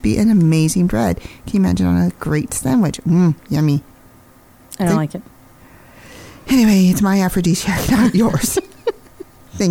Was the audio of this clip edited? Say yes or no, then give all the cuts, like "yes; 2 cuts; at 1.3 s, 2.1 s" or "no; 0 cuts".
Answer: no; 0 cuts